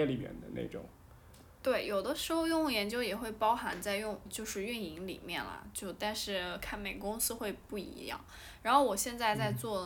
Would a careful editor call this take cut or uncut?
cut